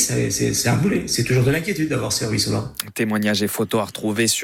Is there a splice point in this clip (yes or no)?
no